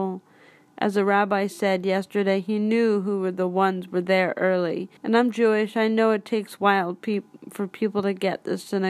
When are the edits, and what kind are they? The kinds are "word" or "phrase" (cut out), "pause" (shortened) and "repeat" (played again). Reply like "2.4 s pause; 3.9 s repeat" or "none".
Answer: 5.0 s pause